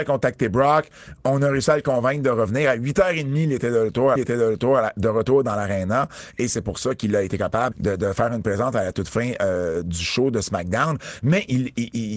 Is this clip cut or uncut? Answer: cut